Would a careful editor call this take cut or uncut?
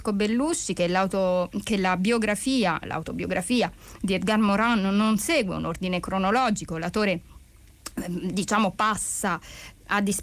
uncut